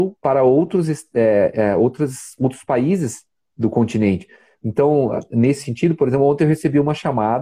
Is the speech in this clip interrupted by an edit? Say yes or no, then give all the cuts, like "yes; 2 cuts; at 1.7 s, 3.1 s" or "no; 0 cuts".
no; 0 cuts